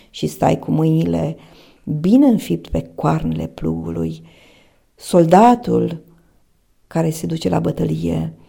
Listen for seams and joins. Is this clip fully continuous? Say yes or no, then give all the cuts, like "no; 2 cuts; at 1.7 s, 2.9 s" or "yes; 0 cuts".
yes; 0 cuts